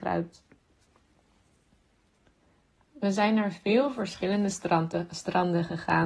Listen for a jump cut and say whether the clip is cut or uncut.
uncut